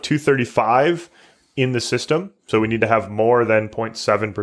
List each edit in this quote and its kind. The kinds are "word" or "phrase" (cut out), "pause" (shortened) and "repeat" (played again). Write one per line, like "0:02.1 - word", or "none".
none

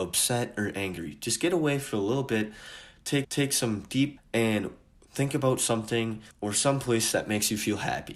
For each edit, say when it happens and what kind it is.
0:03.2 - repeat
0:04.2 - word
0:06.3 - pause

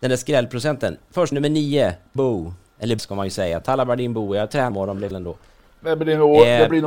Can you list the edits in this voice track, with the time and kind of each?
0:01.3 - word
0:02.2 - word
0:03.0 - word
0:04.7 - word
0:05.1 - word

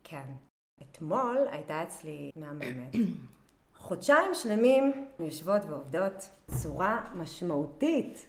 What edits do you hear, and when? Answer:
0:02.3 - word
0:05.2 - word

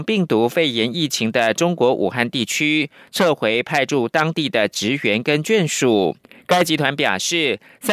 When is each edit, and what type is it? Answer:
0:06.2 - pause

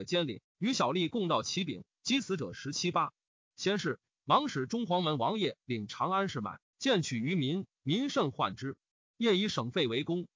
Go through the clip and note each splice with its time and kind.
none

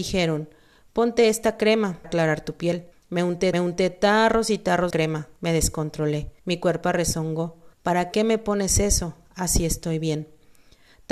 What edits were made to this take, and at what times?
0:02.0 - word
0:02.9 - pause
0:03.5 - repeat
0:04.9 - word
0:05.4 - pause
0:06.4 - pause
0:07.7 - pause

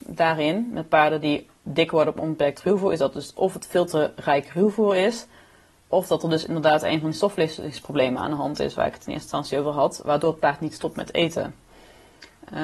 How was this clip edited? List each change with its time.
none

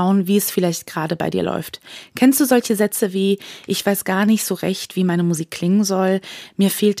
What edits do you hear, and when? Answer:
none

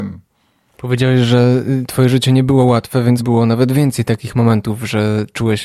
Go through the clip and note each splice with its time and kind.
0:03.2 - word

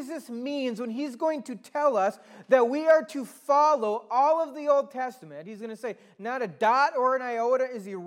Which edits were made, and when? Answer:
none

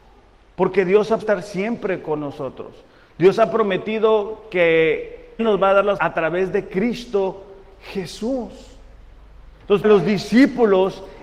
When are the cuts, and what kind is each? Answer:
0:01.2 - word
0:05.4 - word
0:06.0 - word
0:09.8 - word

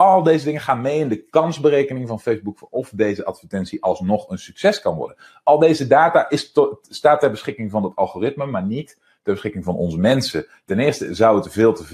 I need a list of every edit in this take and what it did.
none

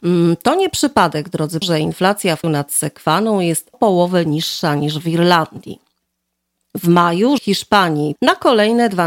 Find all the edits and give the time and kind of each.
0:01.6 - word
0:02.4 - word
0:03.7 - word
0:07.4 - word
0:08.2 - word

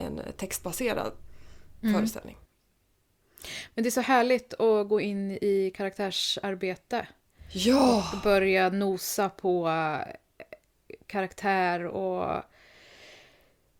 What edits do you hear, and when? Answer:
none

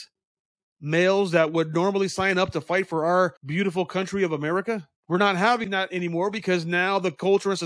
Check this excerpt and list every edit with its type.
0:03.4 - pause
0:05.0 - pause

